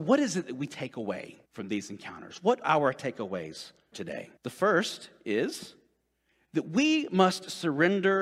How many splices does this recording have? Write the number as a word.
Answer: four